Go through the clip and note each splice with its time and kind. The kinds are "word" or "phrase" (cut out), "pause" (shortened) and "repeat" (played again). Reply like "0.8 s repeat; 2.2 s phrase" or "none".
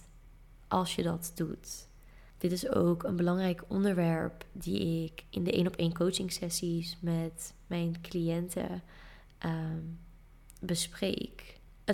none